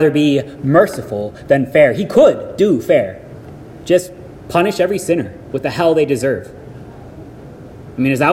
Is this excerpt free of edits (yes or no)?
yes